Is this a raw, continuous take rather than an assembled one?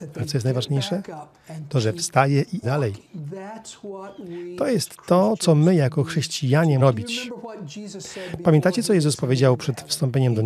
no; 2 cuts; at 2.6 s, 6.8 s

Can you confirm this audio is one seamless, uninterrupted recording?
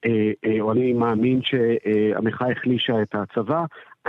yes; 0 cuts

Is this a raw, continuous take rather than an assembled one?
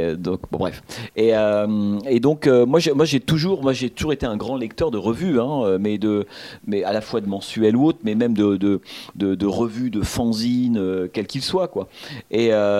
yes; 0 cuts

